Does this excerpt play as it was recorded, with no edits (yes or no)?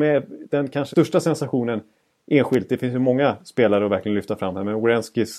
no